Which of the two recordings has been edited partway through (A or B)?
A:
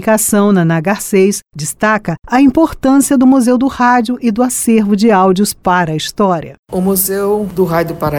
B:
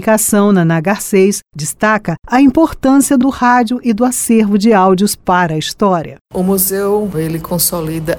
B